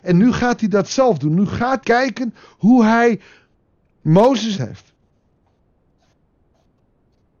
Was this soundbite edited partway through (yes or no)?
yes